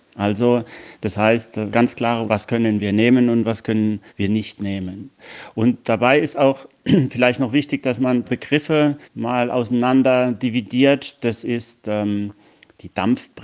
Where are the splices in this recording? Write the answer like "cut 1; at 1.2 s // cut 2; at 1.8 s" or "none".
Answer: cut 1; at 1.7 s // cut 2; at 2.3 s // cut 3; at 4.1 s // cut 4; at 8.2 s // cut 5; at 9.0 s